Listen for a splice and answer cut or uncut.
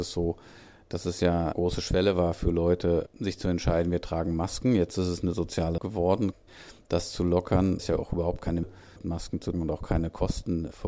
cut